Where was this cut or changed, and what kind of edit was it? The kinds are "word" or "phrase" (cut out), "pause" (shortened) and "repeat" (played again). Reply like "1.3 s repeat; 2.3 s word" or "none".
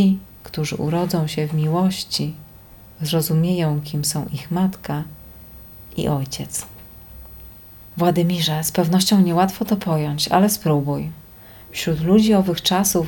none